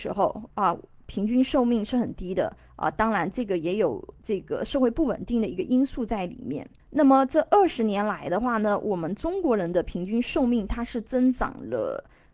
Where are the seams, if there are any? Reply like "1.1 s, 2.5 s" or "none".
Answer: 6.8 s

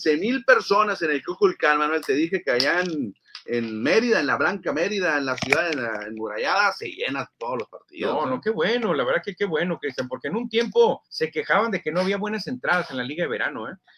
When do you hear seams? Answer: 11.0 s

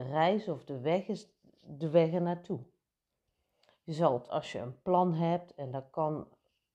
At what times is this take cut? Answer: 4.3 s

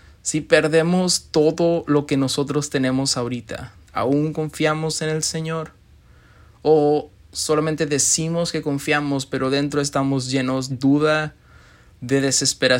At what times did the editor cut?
10.7 s

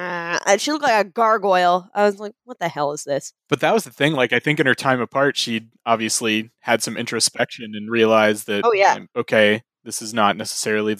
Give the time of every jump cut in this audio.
3.4 s

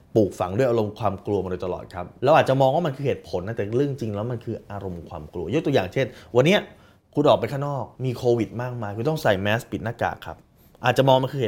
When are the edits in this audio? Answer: 2.2 s, 7.9 s

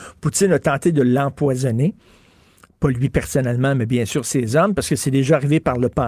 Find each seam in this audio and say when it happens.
none

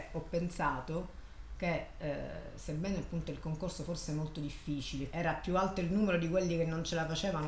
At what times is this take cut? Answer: 5.1 s

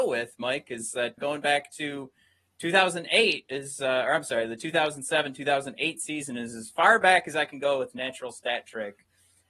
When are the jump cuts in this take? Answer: 1.2 s

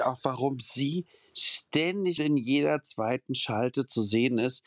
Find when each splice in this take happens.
2.2 s

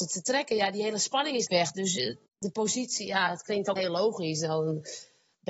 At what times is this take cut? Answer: 1.5 s, 2.3 s, 3.8 s

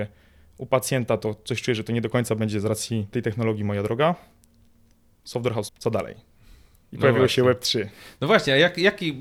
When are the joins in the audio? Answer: 3.1 s, 5.7 s

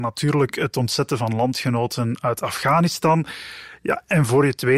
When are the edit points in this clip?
none

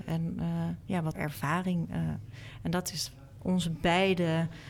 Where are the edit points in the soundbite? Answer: 1.1 s, 3.4 s

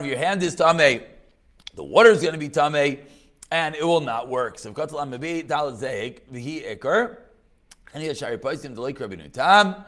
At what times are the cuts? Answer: none

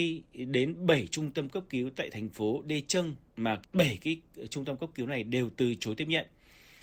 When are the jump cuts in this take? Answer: 3.3 s

